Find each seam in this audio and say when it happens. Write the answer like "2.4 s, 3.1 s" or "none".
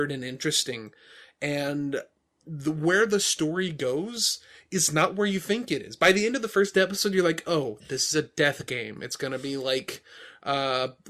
none